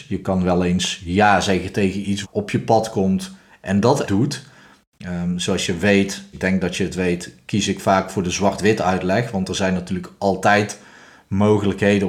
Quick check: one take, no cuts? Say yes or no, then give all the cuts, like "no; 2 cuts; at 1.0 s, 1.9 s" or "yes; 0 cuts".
no; 3 cuts; at 2.2 s, 4.1 s, 6.3 s